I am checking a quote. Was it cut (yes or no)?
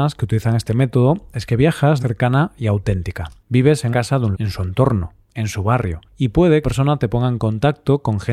yes